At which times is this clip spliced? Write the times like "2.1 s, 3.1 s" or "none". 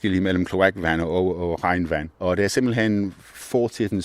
2.1 s